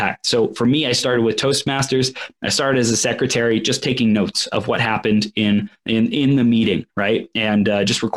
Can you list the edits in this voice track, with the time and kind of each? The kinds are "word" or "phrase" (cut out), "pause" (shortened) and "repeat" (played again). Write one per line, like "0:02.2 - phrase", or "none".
0:06.9 - pause

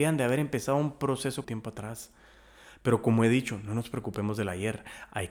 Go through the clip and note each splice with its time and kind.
0:01.4 - phrase

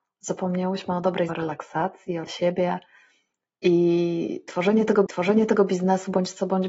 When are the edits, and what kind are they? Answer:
0:01.3 - word
0:02.3 - phrase
0:05.1 - repeat

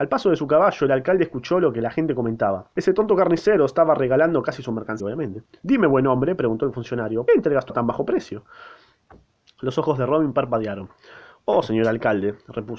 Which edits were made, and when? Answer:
0:02.7 - pause
0:05.0 - phrase
0:07.3 - phrase
0:07.7 - word
0:09.3 - pause

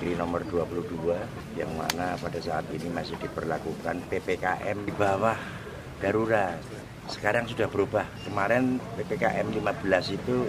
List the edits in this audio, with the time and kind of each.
none

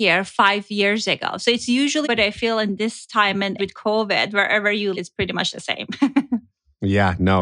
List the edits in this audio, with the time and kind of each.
0:02.0 - word
0:03.6 - word
0:04.9 - word

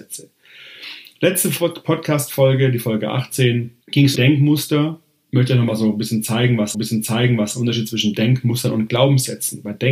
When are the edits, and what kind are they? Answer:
0:03.8 - pause
0:04.2 - word
0:06.7 - repeat

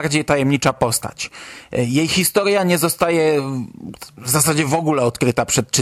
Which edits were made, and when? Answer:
none

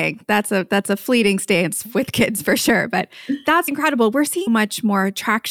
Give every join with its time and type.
0:03.7 - word
0:04.5 - word

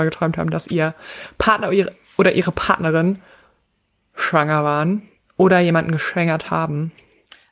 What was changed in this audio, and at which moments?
none

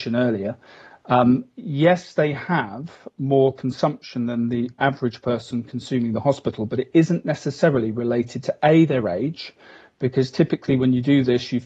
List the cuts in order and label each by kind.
none

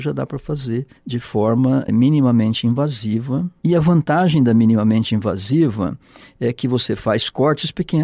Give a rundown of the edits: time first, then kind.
0:01.0 - pause

